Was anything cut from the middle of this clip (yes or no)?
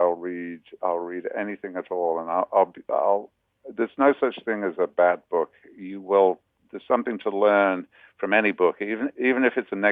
no